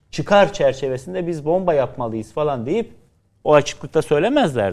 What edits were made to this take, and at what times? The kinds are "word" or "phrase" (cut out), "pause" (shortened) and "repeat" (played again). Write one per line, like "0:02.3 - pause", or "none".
none